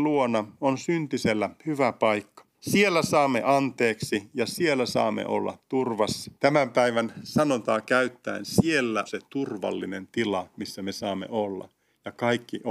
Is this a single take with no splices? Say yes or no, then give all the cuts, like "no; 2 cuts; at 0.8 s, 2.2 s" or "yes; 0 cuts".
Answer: no; 3 cuts; at 2.5 s, 6.4 s, 9.1 s